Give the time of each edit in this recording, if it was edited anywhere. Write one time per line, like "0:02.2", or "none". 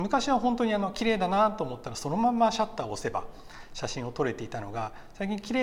none